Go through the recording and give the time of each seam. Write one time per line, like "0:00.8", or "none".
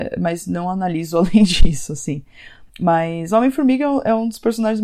0:02.7